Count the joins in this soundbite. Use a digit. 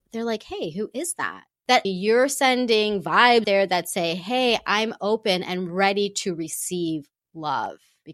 2